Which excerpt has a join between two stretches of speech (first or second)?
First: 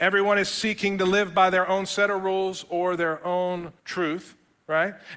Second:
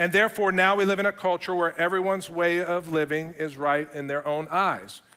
first